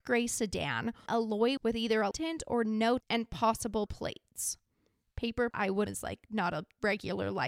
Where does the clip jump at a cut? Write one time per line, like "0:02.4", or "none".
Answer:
0:01.1
0:01.6
0:02.1
0:03.0
0:03.9
0:05.5
0:05.9